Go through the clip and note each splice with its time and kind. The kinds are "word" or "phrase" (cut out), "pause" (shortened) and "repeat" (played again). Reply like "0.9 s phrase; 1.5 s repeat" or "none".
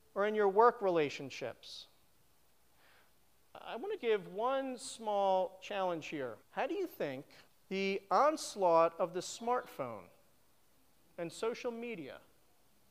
4.0 s word; 6.4 s pause; 7.5 s pause